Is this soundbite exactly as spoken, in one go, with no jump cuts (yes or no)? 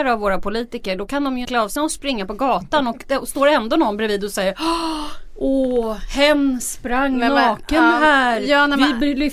no